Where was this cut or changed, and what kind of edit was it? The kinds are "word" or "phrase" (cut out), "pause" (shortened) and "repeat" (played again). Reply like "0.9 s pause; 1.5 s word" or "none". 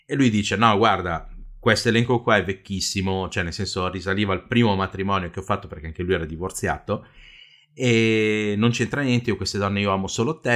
none